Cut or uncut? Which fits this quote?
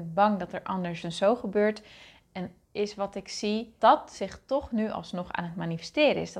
cut